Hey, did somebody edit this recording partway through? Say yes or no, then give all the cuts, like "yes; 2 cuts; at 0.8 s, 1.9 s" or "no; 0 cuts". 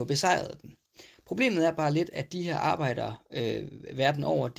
no; 0 cuts